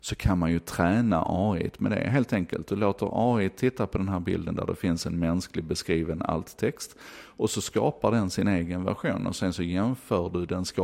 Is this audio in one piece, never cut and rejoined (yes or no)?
yes